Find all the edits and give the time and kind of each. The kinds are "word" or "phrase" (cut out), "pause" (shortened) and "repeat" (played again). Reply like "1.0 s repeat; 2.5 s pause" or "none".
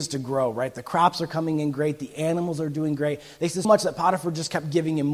3.6 s word